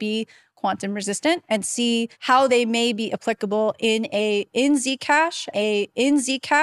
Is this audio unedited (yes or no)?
no